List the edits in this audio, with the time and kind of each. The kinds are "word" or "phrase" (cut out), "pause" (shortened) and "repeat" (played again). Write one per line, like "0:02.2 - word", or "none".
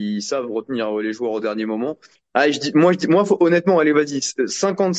0:02.2 - pause